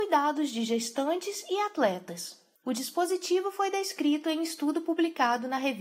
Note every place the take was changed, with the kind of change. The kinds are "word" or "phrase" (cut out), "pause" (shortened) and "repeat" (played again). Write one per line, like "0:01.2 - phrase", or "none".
0:02.6 - pause